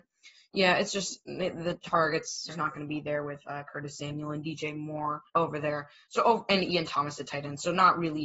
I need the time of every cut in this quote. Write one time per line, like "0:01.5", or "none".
0:02.5
0:05.3

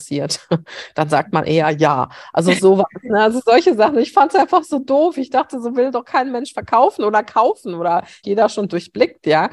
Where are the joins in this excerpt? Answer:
0:08.2

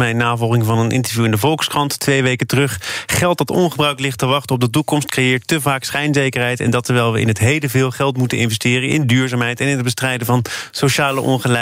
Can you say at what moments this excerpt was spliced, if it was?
none

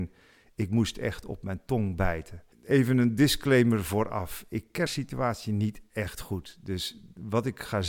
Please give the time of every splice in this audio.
0:02.5
0:04.9

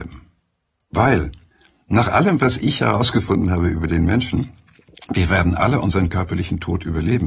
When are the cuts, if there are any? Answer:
0:01.5

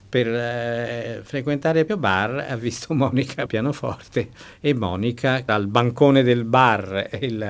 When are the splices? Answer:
0:01.9
0:03.5
0:05.5

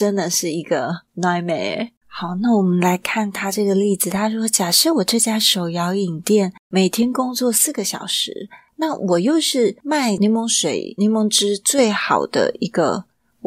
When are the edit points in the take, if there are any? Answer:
0:02.0
0:06.6

